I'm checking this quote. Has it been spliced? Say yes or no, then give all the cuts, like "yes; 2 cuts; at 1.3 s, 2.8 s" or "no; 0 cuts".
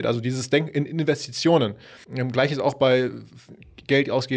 yes; 1 cut; at 2.0 s